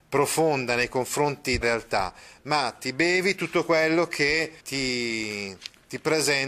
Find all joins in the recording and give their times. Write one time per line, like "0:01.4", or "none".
0:01.6
0:04.6